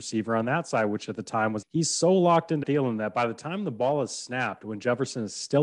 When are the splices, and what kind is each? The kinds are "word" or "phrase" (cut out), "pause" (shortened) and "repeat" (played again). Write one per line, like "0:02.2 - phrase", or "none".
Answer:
0:01.6 - phrase
0:02.6 - word